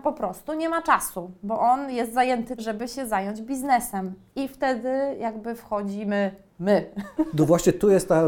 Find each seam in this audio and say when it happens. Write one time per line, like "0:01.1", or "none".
0:02.6